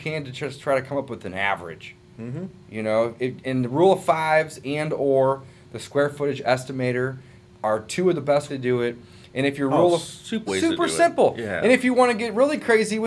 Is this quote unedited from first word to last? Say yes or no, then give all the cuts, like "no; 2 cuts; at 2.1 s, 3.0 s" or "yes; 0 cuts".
no; 2 cuts; at 8.5 s, 10.5 s